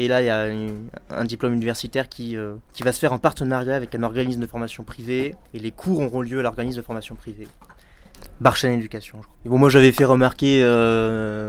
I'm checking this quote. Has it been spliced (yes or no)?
no